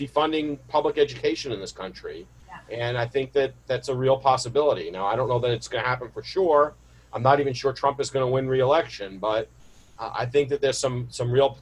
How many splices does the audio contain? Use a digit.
0